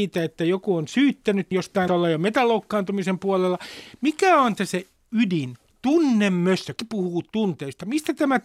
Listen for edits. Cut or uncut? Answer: cut